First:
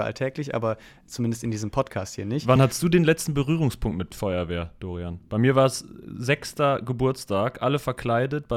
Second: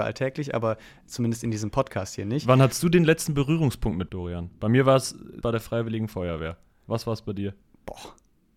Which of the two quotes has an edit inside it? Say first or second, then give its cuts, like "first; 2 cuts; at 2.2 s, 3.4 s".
second; 2 cuts; at 4.1 s, 5.4 s